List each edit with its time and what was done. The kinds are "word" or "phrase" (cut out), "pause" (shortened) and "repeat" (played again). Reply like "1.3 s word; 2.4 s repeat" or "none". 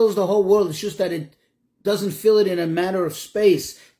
none